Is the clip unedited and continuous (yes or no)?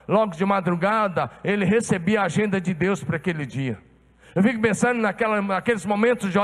yes